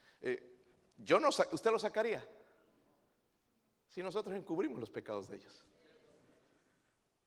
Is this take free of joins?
yes; 0 cuts

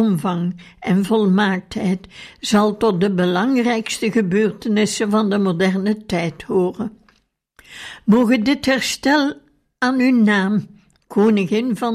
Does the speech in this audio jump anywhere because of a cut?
no; 0 cuts

